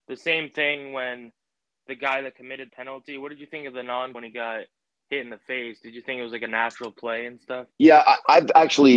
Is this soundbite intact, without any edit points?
no; 3 cuts; at 2.7 s, 4.1 s, 7.7 s

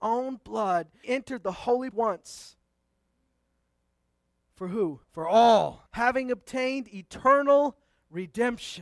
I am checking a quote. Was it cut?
yes; 4 cuts; at 1.0 s, 1.9 s, 5.0 s, 5.9 s

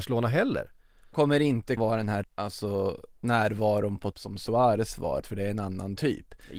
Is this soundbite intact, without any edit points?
no; 5 cuts; at 1.1 s, 1.8 s, 2.2 s, 4.1 s, 5.2 s

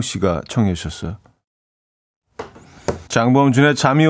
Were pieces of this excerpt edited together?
yes; 1 cut; at 3.1 s

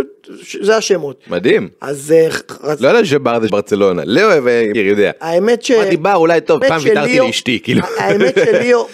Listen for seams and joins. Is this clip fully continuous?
no; 3 cuts; at 3.5 s, 4.7 s, 6.6 s

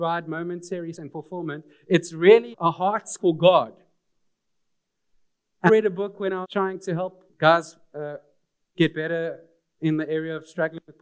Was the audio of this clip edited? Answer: yes; 6 cuts; at 0.9 s, 2.5 s, 3.2 s, 5.7 s, 6.4 s, 7.3 s

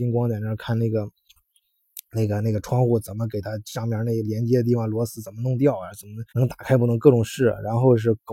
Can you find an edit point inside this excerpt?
yes; 1 cut; at 6.3 s

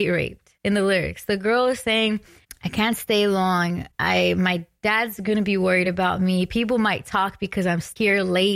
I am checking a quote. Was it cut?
no; 0 cuts

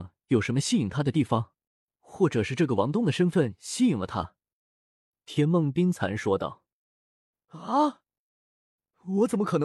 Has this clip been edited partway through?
yes; 1 cut; at 1.7 s

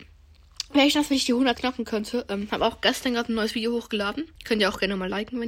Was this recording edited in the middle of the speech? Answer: yes; 2 cuts; at 1.5 s, 4.4 s

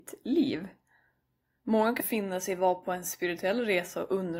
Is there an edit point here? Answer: yes; 1 cut; at 2.0 s

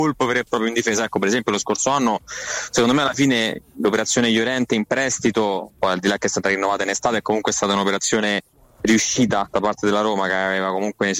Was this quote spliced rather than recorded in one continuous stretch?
no; 0 cuts

